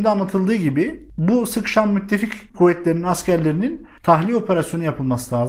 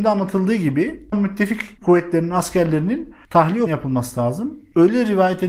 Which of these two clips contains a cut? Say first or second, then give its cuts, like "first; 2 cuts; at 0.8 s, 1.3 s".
second; 2 cuts; at 1.1 s, 3.7 s